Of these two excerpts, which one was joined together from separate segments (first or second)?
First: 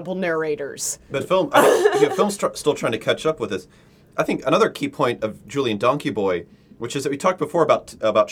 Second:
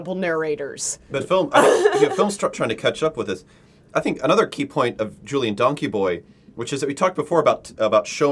second